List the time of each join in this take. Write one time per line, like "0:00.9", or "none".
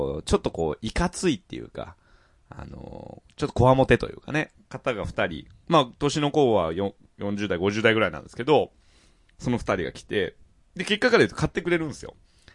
0:10.6